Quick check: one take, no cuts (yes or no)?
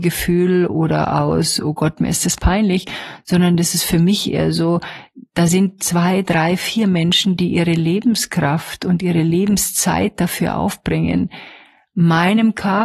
yes